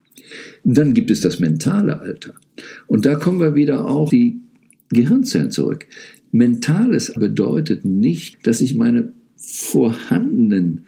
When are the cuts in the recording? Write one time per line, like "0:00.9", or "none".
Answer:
0:04.1
0:07.2
0:08.3